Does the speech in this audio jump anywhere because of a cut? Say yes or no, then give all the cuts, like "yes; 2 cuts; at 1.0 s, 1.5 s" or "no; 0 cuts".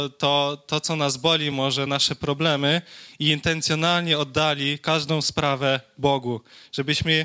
no; 0 cuts